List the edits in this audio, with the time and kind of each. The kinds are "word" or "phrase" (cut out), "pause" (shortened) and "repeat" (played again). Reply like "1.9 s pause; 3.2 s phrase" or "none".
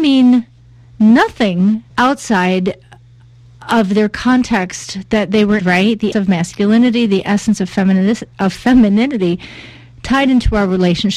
1.9 s pause; 5.6 s word; 6.1 s word